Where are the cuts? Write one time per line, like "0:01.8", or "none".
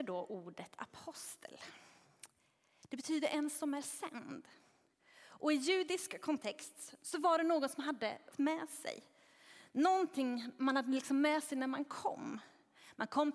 0:08.3